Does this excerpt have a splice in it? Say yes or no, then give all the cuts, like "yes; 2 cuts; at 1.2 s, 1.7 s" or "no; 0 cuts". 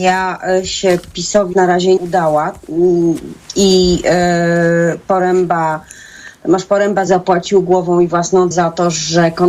yes; 4 cuts; at 1.5 s, 2.0 s, 7.1 s, 8.5 s